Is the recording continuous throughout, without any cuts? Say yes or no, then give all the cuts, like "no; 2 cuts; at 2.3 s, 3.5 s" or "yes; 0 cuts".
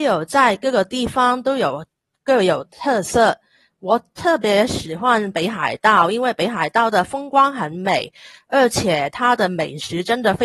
yes; 0 cuts